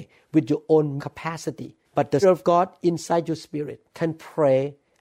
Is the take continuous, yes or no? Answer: no